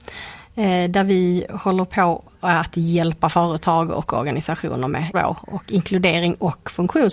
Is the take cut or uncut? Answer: cut